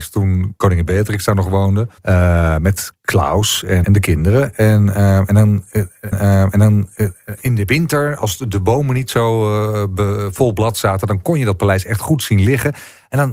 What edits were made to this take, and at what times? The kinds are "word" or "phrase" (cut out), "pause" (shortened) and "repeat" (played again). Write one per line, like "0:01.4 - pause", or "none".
0:02.0 - pause
0:03.8 - word
0:06.1 - repeat